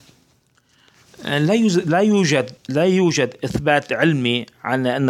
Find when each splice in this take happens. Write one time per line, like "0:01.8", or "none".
0:02.6